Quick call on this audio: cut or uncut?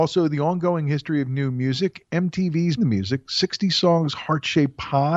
cut